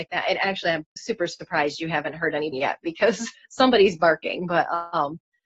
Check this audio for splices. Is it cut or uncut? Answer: cut